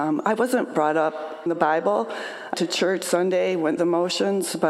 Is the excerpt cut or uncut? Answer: cut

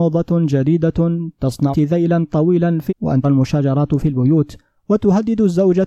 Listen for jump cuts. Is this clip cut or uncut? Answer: cut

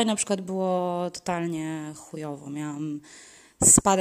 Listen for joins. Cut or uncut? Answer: uncut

